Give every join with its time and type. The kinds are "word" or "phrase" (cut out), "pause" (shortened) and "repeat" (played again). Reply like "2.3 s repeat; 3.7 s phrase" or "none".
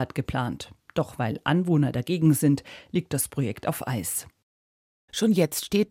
none